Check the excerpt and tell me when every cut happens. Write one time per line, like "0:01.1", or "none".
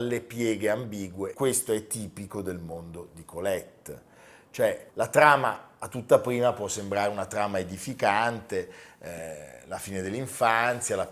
0:01.3
0:04.9